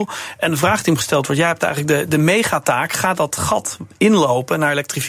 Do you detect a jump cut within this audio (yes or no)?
no